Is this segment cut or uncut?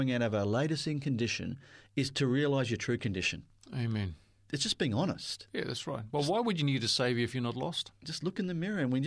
uncut